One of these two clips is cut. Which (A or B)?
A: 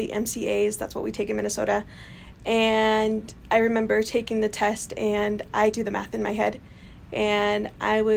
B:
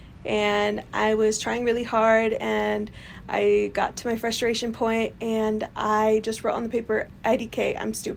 A